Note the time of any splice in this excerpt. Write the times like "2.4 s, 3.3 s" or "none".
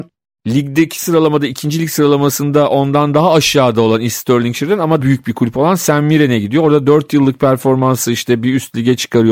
5.0 s